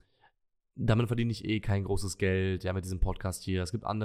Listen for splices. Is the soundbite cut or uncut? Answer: uncut